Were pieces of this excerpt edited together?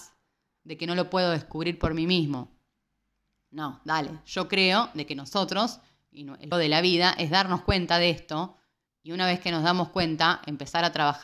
yes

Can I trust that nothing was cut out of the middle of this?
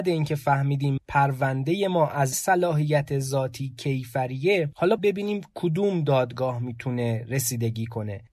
no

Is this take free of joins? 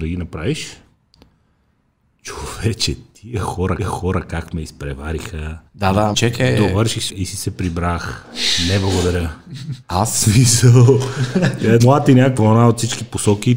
no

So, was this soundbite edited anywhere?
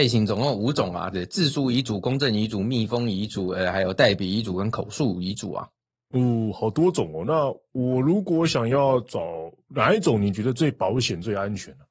no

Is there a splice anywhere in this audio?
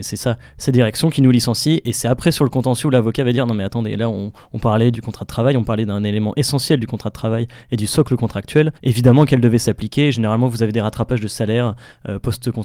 yes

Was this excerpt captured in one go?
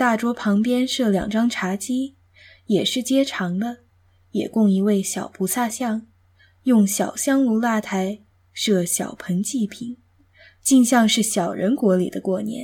yes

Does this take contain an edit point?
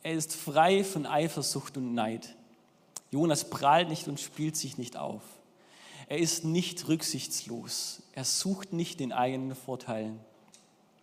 no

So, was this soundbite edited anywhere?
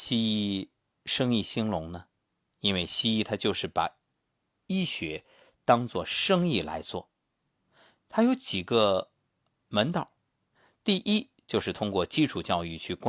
no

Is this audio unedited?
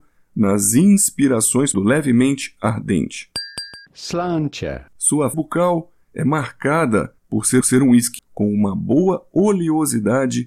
no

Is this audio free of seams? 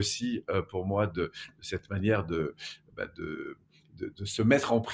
yes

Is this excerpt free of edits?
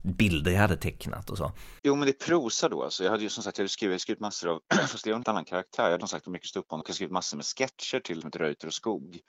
no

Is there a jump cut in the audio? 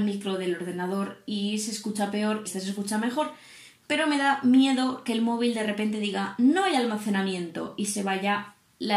yes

